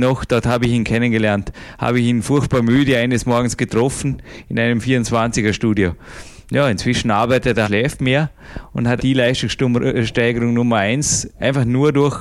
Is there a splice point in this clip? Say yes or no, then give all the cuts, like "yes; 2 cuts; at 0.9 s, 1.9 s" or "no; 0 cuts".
yes; 2 cuts; at 7.6 s, 9.0 s